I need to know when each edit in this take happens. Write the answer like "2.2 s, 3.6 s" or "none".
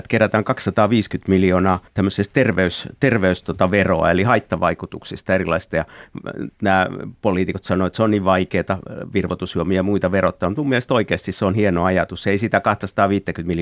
1.9 s